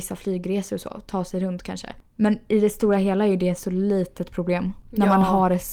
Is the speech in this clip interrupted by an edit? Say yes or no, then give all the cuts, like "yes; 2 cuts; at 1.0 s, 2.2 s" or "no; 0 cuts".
no; 0 cuts